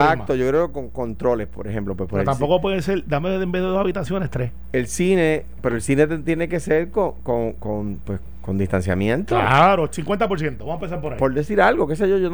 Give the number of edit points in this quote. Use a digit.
0